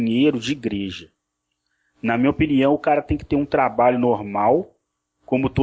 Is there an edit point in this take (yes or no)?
no